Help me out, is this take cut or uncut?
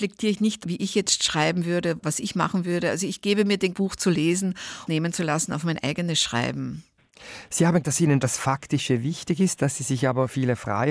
cut